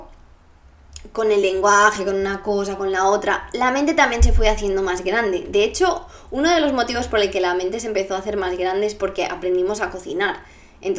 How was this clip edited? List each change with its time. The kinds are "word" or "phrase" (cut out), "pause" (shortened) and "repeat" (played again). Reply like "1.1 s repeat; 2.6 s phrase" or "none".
none